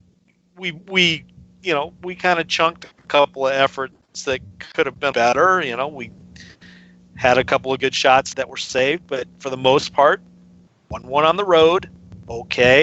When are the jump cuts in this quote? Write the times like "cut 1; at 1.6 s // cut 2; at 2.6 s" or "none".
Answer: cut 1; at 5.1 s // cut 2; at 8.3 s